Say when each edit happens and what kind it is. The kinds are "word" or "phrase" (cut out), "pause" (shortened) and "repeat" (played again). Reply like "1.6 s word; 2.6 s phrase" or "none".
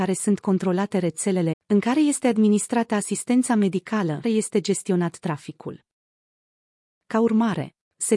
1.5 s word; 4.2 s phrase